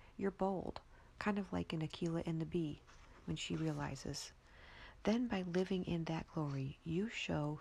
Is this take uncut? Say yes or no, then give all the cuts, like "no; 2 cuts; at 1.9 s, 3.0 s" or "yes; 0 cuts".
yes; 0 cuts